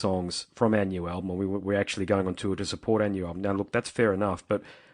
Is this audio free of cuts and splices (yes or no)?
yes